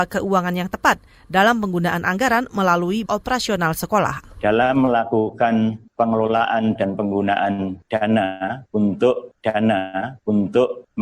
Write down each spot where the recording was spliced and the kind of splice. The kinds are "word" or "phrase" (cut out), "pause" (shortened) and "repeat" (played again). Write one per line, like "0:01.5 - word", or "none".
0:03.1 - word
0:06.8 - word
0:09.4 - repeat